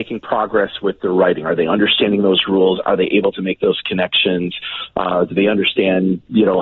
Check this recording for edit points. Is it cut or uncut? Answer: uncut